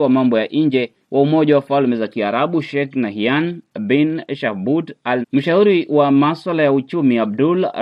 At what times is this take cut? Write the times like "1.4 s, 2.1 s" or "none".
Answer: 1.0 s, 5.2 s